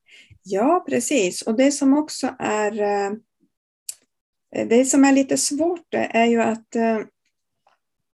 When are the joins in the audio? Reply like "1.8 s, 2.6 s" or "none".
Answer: none

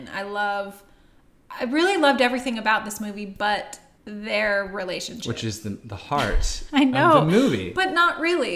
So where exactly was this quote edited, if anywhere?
none

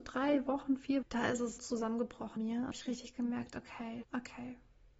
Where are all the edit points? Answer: 1.0 s, 1.6 s, 2.4 s, 2.7 s, 4.0 s

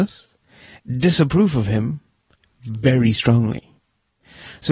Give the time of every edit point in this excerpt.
none

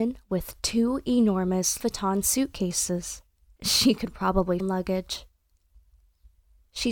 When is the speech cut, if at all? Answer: 1.8 s, 3.4 s, 4.6 s

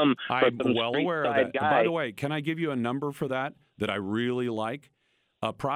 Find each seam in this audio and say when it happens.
none

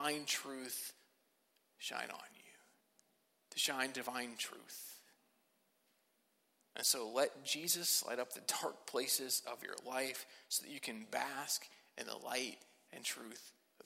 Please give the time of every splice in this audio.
2.8 s

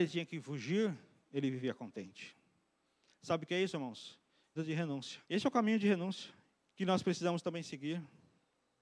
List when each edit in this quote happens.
4.6 s, 5.2 s, 6.6 s

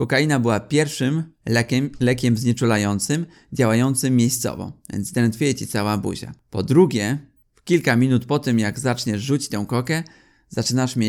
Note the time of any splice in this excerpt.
1.3 s

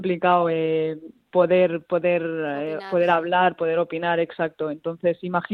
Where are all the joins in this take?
none

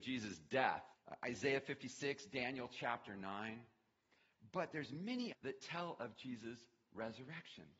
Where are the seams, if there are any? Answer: 0.9 s, 5.3 s

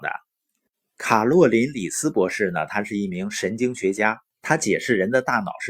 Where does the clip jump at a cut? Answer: 4.3 s

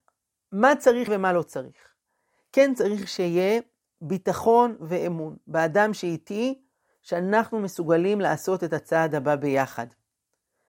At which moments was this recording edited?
1.1 s

